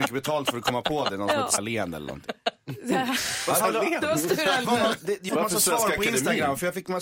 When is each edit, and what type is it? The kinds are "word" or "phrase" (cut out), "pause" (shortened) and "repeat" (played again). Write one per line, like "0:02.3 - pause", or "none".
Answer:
0:01.6 - word
0:03.6 - word
0:04.6 - word
0:05.3 - word